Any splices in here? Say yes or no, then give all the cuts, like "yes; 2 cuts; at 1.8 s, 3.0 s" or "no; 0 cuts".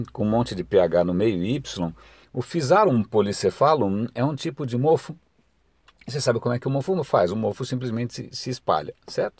no; 0 cuts